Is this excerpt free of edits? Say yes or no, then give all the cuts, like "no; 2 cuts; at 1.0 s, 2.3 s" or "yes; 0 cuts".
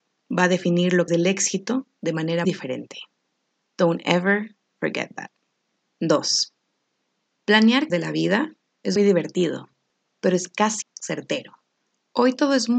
no; 5 cuts; at 1.1 s, 2.4 s, 7.9 s, 9.0 s, 10.8 s